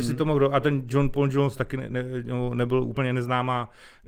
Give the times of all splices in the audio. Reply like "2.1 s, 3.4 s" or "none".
none